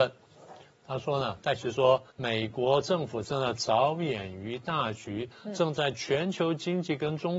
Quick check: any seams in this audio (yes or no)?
yes